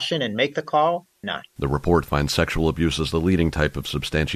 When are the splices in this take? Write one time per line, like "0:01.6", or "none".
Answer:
0:01.2